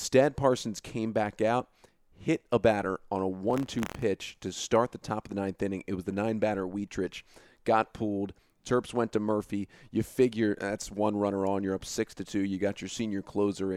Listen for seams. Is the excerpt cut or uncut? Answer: uncut